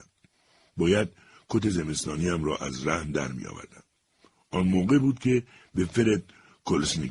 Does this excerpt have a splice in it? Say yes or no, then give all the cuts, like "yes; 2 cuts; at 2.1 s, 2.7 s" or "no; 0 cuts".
no; 0 cuts